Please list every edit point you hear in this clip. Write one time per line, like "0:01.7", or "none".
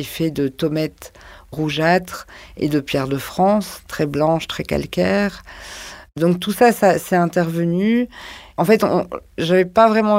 none